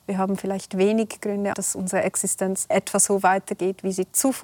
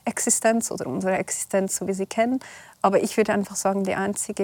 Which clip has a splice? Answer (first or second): first